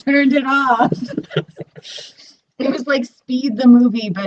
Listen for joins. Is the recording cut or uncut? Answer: uncut